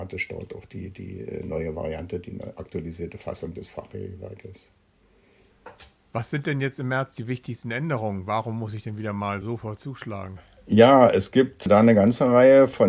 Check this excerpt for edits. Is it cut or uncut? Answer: uncut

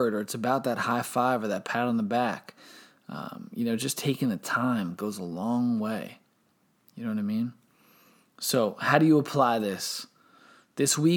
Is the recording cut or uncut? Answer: uncut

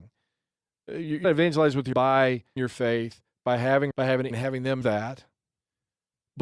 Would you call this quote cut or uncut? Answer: cut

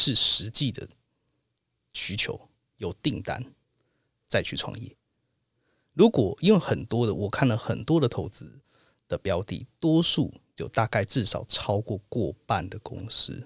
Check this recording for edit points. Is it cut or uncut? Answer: uncut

